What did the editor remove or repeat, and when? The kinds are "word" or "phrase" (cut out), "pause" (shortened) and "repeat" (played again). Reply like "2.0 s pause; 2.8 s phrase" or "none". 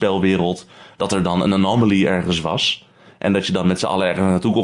none